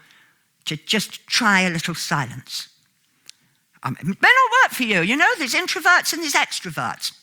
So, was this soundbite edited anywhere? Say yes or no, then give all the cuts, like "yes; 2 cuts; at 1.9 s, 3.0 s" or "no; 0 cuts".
no; 0 cuts